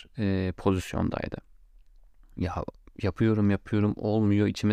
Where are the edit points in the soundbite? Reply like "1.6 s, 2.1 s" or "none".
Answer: none